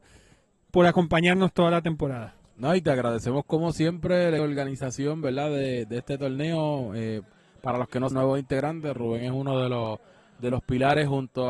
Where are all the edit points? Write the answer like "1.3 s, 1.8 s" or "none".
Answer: 4.4 s, 8.1 s